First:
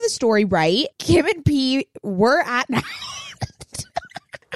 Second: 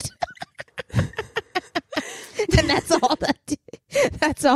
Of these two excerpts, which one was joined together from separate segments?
first; 2 cuts; at 0.9 s, 2.7 s

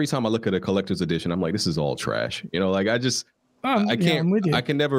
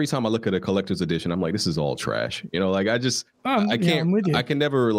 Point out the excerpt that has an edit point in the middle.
second; 1 cut; at 3.3 s

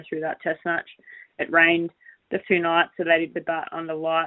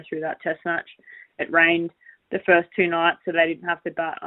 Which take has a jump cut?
first; 2 cuts; at 2.4 s, 3.3 s

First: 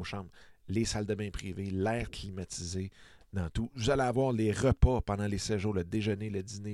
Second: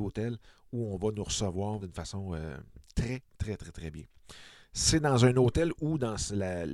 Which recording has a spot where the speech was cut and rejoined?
second; 3 cuts; at 1.8 s, 2.9 s, 3.6 s

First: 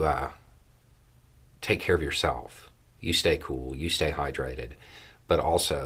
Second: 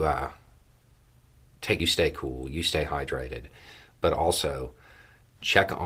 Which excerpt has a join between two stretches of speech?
second; 1 cut; at 1.8 s

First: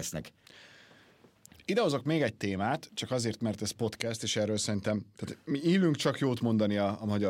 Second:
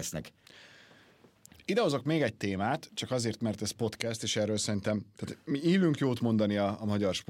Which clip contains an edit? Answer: second; 1 cut; at 6.0 s

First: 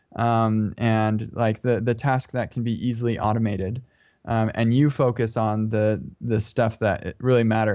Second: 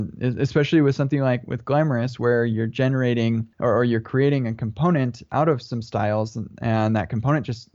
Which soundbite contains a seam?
second; 1 cut; at 3.5 s

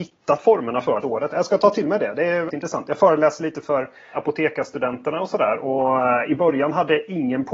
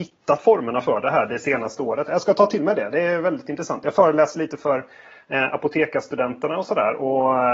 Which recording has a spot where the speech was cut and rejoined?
first; 3 cuts; at 1.0 s, 2.5 s, 4.1 s

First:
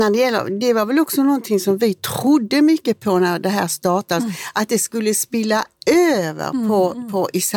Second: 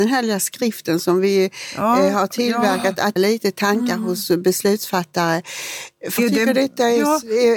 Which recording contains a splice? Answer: second; 2 cuts; at 3.2 s, 6.2 s

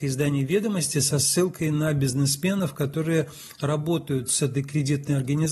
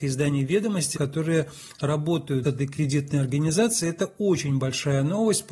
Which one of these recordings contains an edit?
second; 2 cuts; at 0.9 s, 2.4 s

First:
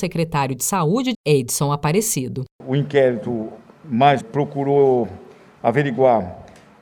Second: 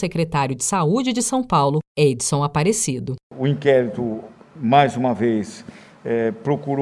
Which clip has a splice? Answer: first; 2 cuts; at 1.1 s, 4.2 s

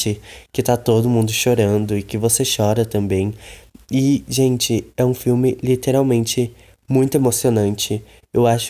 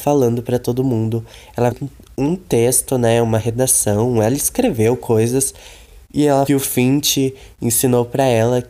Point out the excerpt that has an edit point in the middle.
second; 2 cuts; at 1.7 s, 6.5 s

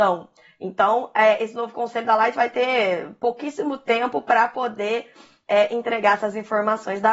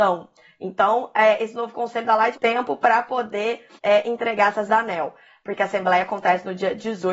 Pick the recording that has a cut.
second; 3 cuts; at 2.3 s, 3.8 s, 4.7 s

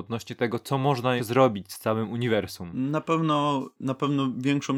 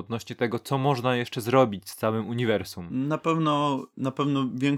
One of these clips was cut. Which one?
first; 1 cut; at 1.2 s

